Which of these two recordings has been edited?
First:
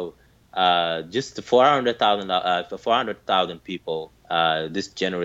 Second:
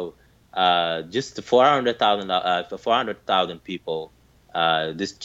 first; 1 cut; at 4.2 s

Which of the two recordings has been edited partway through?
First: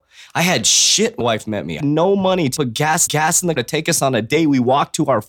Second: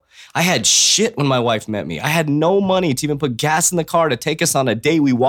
first; 5 cuts; at 1.2 s, 1.8 s, 2.6 s, 3.1 s, 3.6 s

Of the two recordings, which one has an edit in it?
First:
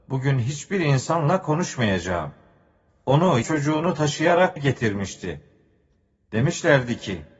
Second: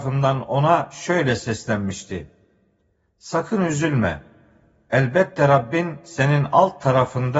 first; 2 cuts; at 3.4 s, 4.6 s

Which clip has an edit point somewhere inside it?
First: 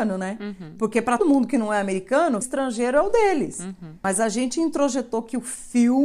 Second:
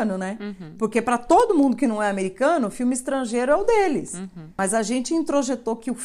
first; 2 cuts; at 1.2 s, 2.4 s

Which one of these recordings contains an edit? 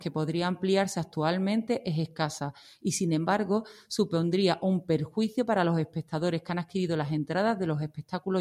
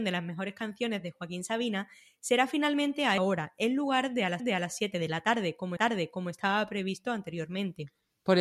second; 3 cuts; at 3.2 s, 4.4 s, 5.8 s

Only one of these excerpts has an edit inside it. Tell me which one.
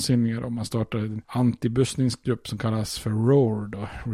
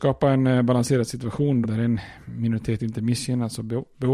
second; 1 cut; at 1.6 s

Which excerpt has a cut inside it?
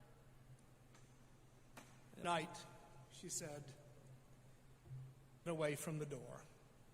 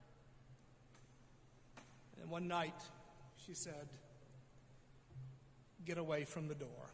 first; 2 cuts; at 2.2 s, 5.5 s

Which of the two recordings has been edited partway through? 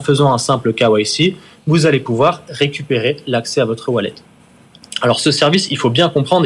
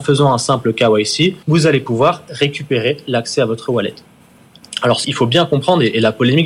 second; 2 cuts; at 1.4 s, 5.0 s

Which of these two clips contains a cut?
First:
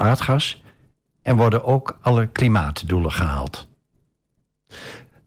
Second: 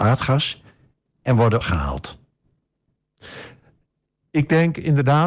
second; 1 cut; at 1.6 s

